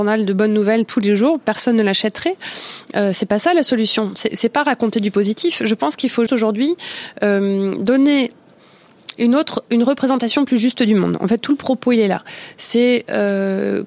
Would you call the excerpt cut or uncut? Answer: cut